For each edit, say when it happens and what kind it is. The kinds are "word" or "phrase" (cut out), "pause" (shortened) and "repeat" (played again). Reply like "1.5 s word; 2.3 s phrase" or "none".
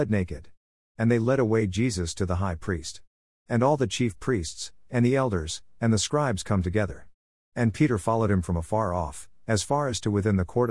none